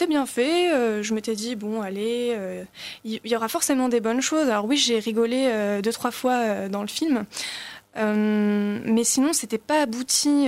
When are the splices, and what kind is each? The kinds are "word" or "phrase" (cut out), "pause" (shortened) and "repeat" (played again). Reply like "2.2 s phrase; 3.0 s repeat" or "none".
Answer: none